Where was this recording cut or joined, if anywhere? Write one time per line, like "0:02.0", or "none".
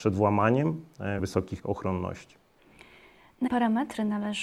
0:01.2
0:01.6
0:03.5